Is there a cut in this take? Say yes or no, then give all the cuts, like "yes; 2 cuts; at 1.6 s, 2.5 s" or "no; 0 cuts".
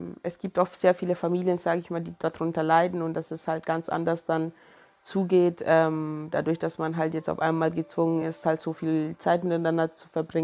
no; 0 cuts